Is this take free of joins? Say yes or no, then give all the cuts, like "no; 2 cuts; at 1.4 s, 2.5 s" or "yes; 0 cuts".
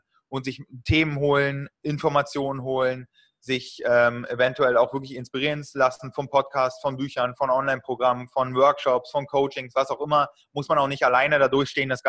yes; 0 cuts